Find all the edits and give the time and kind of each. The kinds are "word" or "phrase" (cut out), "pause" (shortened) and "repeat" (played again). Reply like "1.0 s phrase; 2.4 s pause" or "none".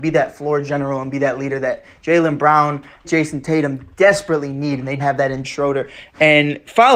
3.0 s word; 5.0 s word; 5.4 s word